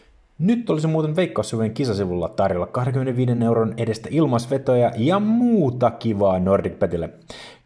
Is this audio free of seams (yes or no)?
yes